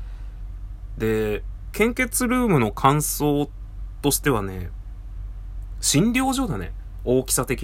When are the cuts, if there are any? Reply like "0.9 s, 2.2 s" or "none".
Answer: 1.7 s